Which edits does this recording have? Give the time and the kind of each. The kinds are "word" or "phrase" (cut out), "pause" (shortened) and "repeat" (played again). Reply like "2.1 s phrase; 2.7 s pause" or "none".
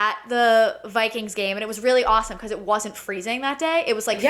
none